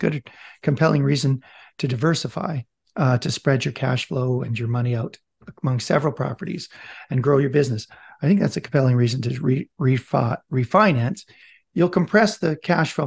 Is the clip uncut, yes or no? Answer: yes